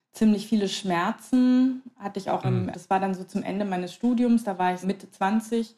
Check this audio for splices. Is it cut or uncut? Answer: cut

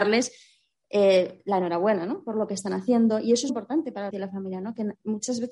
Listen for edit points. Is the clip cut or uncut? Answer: cut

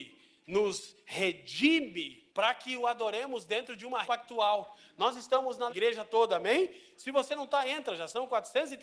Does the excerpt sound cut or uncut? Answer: cut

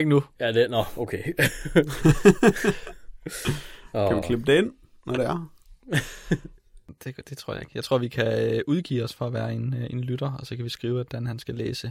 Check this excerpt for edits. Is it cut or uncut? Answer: uncut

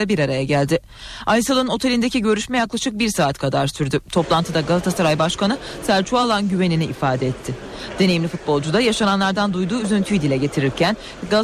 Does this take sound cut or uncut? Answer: uncut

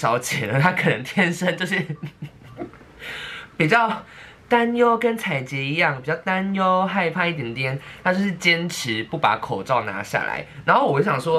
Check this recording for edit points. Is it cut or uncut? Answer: cut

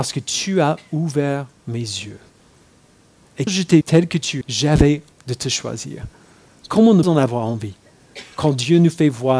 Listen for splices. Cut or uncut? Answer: cut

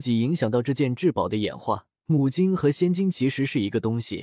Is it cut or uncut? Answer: cut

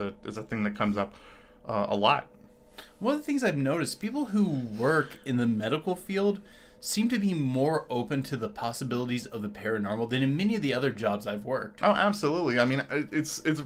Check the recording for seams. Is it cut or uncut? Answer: uncut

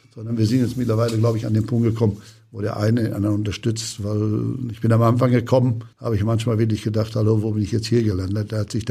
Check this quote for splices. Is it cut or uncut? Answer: cut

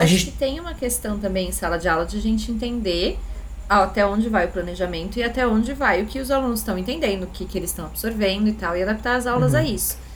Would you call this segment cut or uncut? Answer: uncut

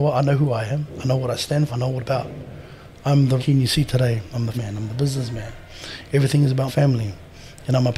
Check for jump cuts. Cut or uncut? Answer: cut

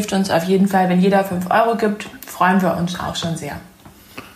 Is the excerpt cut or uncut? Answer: uncut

